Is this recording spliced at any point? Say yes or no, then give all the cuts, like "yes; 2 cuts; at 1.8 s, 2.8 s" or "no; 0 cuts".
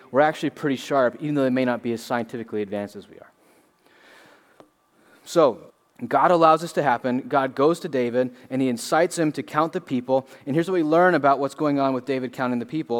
yes; 1 cut; at 5.7 s